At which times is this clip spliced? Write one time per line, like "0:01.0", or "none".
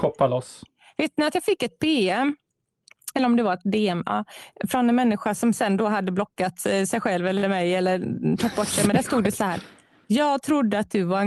none

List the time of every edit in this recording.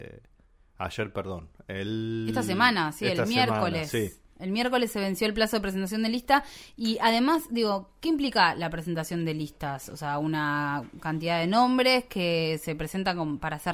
none

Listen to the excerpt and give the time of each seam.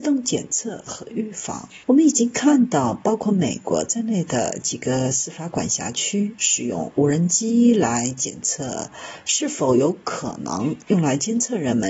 0:01.8

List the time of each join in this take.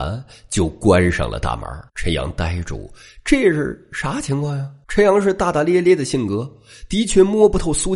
0:01.9
0:04.8

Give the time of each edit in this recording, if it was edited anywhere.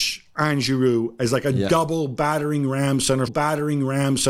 0:03.3

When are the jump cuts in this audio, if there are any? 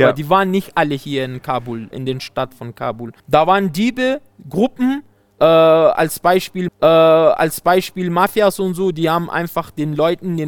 0:01.9
0:03.2
0:06.7

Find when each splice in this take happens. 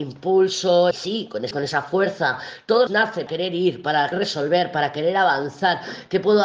0:00.9
0:01.5
0:02.9
0:03.3
0:04.1

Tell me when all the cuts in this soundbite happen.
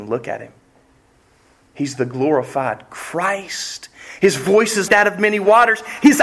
0:04.9

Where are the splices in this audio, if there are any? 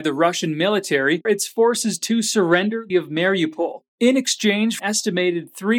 0:01.2
0:02.9
0:04.8

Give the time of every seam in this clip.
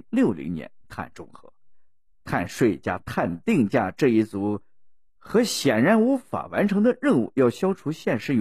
none

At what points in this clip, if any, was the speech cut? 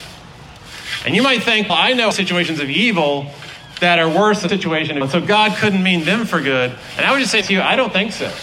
0:01.7
0:02.1
0:04.5
0:05.0
0:07.4

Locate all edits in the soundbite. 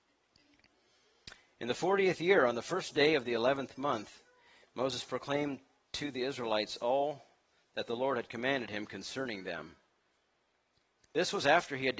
none

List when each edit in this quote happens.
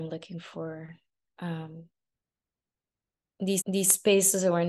0:03.6

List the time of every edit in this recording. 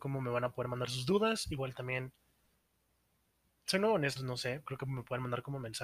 0:04.2
0:04.7

